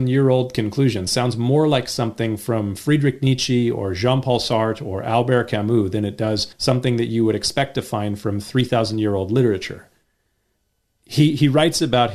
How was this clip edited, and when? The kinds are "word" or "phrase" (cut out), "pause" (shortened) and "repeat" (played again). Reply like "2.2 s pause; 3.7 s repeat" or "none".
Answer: 6.5 s pause